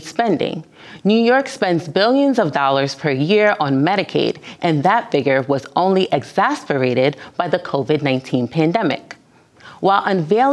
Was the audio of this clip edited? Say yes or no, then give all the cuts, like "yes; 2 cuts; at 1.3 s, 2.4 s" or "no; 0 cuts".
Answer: no; 0 cuts